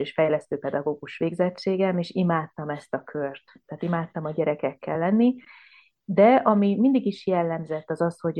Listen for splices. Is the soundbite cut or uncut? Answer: uncut